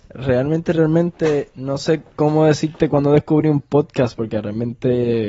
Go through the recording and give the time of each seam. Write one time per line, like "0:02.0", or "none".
none